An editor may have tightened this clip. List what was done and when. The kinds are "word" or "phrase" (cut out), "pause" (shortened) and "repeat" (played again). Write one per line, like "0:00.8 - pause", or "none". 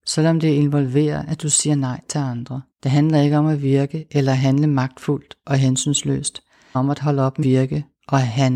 0:02.7 - pause
0:06.7 - phrase
0:07.4 - word

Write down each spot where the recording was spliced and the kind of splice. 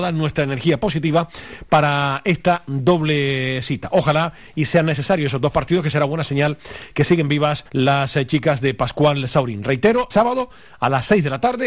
0:07.7 - pause
0:10.1 - word

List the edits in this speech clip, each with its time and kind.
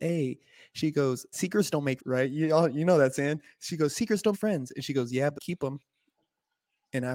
0:01.3 - word
0:02.0 - word
0:04.3 - word
0:05.4 - word

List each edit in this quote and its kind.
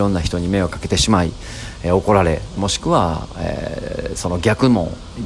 0:02.6 - phrase

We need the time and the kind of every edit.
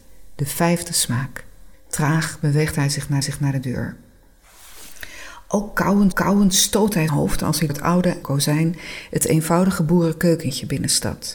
0:01.7 - pause
0:03.2 - repeat
0:06.1 - repeat
0:07.1 - word
0:07.7 - word
0:08.2 - word

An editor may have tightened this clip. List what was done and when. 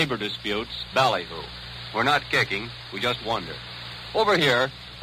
0:00.9 - word

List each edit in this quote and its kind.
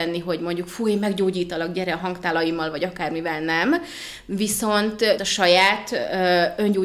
0:05.2 - word

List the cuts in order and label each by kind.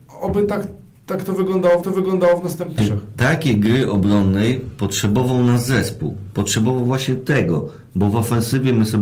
0:01.8 - repeat
0:02.8 - word

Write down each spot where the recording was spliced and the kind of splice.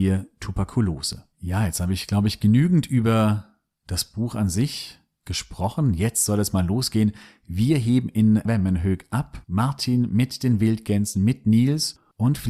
0:01.3 - pause
0:08.4 - word
0:09.4 - word

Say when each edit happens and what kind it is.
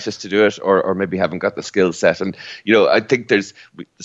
none

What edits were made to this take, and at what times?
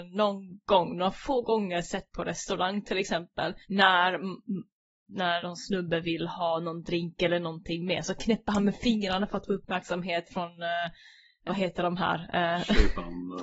0:03.6 - pause
0:05.4 - word
0:11.5 - word

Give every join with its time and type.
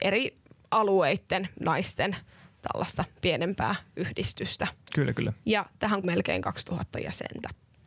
0:01.5 - word
0:06.0 - word

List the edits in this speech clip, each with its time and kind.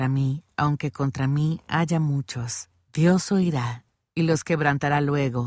none

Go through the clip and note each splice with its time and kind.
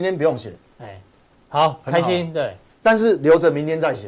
none

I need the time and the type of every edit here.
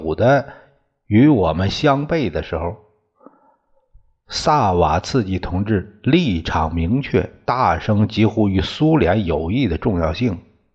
none

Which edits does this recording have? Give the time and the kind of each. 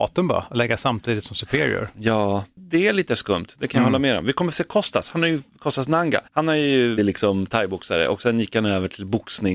0:06.3 - pause
0:07.0 - phrase

